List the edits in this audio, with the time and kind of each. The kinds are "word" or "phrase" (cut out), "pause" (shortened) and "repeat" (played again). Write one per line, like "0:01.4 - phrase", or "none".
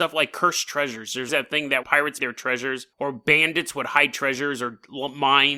0:01.3 - word
0:01.8 - word
0:02.2 - word
0:02.9 - pause